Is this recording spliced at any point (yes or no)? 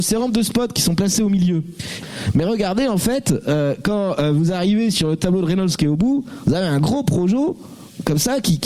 no